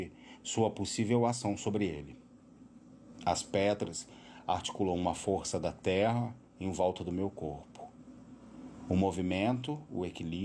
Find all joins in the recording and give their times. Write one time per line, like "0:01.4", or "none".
0:06.5